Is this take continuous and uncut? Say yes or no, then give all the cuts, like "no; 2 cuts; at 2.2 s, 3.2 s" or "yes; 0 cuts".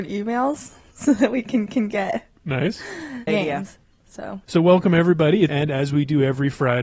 no; 4 cuts; at 1.7 s, 3.3 s, 4.4 s, 5.5 s